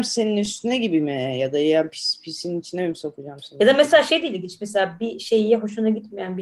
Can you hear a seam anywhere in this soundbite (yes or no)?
no